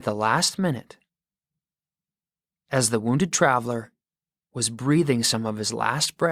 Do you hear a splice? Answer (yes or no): no